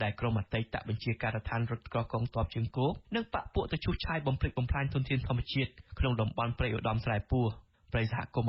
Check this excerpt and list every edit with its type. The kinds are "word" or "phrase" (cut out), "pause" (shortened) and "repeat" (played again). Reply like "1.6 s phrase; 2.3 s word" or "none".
3.0 s pause